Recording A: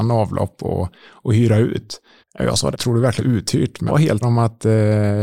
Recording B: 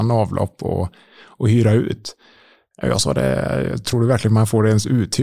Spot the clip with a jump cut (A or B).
A